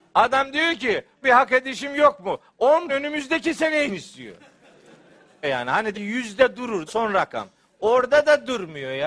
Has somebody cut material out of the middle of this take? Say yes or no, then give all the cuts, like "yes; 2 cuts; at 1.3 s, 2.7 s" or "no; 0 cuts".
yes; 6 cuts; at 1.2 s, 2.9 s, 3.9 s, 5.4 s, 5.9 s, 6.9 s